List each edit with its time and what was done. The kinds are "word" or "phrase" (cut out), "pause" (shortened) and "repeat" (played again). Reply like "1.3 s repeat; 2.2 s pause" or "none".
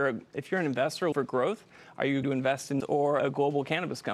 1.1 s word; 2.2 s word; 2.8 s word; 3.2 s word